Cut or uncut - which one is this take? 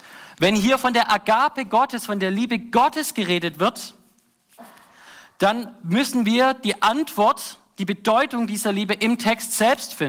uncut